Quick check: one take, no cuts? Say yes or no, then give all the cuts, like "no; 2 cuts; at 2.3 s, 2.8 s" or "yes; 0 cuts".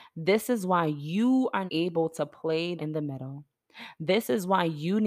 no; 2 cuts; at 1.7 s, 2.8 s